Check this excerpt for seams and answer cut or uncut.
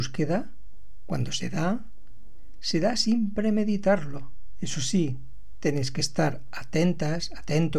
uncut